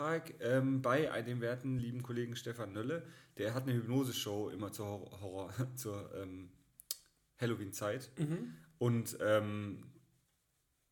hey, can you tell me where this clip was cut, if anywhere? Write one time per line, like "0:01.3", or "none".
none